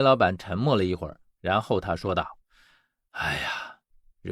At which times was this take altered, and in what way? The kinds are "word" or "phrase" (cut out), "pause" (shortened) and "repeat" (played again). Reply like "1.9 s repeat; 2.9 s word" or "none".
2.4 s pause